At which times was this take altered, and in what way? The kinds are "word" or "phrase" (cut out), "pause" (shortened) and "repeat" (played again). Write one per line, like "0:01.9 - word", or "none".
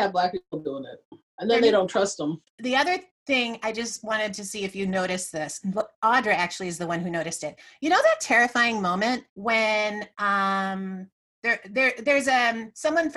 0:01.3 - pause
0:02.5 - pause
0:09.3 - pause